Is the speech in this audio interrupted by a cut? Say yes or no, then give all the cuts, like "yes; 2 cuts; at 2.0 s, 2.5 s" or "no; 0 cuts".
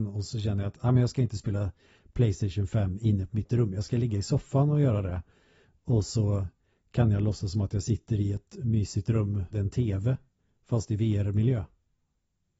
yes; 1 cut; at 9.5 s